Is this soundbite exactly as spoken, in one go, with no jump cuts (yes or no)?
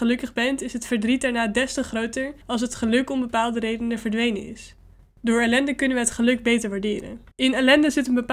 no